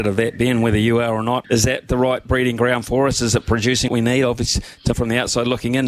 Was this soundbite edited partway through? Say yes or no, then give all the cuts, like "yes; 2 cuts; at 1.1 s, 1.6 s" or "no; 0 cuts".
yes; 3 cuts; at 1.4 s, 3.9 s, 4.9 s